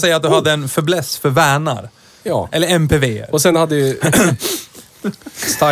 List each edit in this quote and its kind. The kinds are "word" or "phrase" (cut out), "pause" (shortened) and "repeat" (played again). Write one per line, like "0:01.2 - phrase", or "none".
none